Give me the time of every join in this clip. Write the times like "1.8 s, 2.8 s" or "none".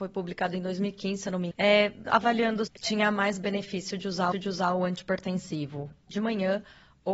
1.5 s, 2.1 s, 2.7 s, 4.3 s